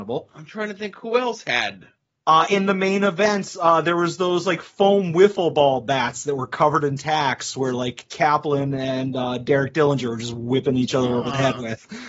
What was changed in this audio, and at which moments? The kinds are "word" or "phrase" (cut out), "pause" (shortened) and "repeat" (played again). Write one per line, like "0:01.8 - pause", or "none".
none